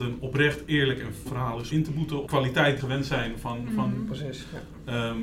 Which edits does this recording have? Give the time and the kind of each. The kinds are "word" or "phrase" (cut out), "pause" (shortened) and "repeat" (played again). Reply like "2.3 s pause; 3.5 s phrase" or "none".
1.3 s word; 1.7 s word; 2.3 s word; 2.8 s word